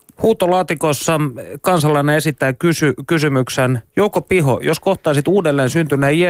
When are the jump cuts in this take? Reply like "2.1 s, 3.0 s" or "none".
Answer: 3.9 s